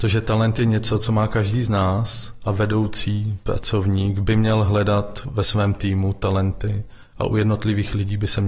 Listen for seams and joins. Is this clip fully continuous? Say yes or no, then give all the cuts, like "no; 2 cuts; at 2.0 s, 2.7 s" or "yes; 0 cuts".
yes; 0 cuts